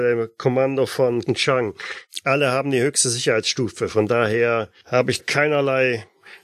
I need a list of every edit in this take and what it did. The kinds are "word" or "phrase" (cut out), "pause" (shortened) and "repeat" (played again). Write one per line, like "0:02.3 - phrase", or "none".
0:01.3 - word
0:05.2 - word